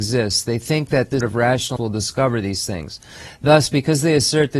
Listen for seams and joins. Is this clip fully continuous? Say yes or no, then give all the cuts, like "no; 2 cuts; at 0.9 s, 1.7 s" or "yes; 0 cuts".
no; 2 cuts; at 1.2 s, 1.8 s